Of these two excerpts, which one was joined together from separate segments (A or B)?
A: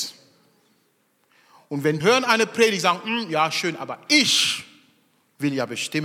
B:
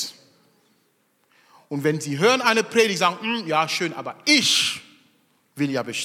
A